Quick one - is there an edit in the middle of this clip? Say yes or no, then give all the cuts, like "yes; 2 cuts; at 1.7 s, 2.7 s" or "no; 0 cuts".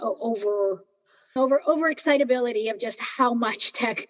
yes; 1 cut; at 1.4 s